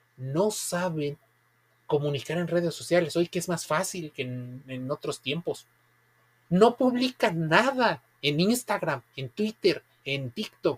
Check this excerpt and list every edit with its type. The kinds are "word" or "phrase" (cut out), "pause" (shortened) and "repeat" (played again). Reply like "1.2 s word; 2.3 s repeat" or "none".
none